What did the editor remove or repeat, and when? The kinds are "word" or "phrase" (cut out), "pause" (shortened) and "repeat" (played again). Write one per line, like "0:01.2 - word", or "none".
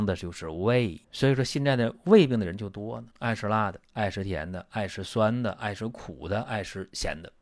0:01.0 - pause
0:03.1 - pause
0:03.8 - pause